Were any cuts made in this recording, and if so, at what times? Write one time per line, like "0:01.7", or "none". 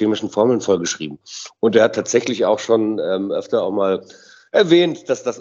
none